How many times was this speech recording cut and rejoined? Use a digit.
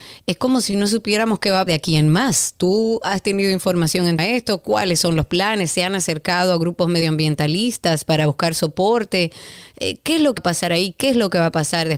3